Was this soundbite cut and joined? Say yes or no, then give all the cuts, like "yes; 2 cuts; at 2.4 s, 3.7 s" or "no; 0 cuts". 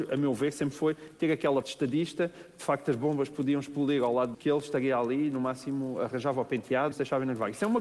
yes; 3 cuts; at 1.6 s, 4.3 s, 6.9 s